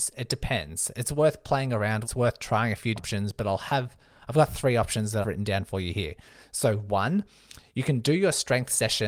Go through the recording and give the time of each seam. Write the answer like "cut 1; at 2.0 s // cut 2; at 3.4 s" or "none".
cut 1; at 2.0 s // cut 2; at 3.0 s // cut 3; at 5.2 s